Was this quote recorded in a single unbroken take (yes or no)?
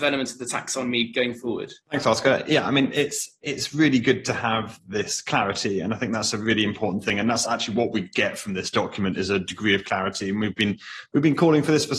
no